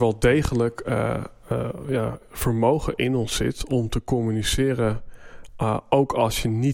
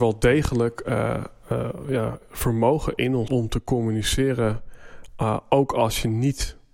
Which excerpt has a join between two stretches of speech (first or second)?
second